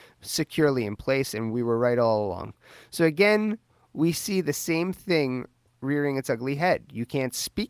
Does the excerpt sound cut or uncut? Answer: uncut